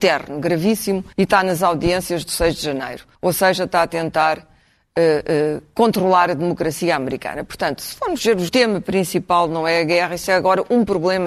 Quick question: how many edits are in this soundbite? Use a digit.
3